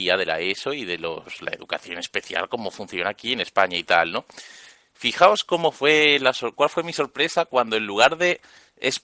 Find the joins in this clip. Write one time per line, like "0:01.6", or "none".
none